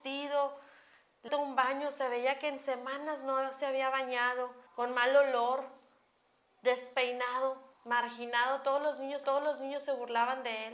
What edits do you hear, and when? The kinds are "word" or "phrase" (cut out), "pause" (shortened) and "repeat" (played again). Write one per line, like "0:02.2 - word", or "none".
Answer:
0:01.3 - phrase
0:04.7 - pause
0:07.7 - pause
0:09.2 - repeat